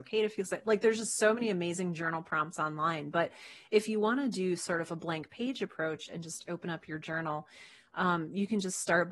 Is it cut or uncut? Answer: uncut